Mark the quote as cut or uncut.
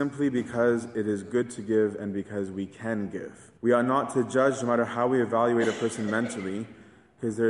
cut